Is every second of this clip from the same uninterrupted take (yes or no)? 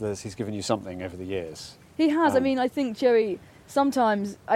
yes